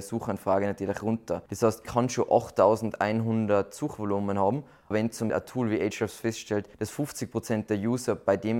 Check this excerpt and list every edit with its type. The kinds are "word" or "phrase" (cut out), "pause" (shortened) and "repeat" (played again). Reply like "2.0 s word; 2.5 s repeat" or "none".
1.5 s pause; 1.8 s word; 4.9 s word; 5.3 s word; 6.7 s pause